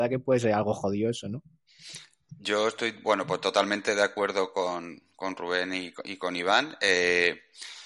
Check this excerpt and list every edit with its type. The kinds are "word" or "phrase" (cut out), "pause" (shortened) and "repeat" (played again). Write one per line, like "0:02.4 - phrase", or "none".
none